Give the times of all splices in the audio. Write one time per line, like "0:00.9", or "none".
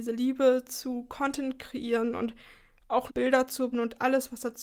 0:03.1
0:03.7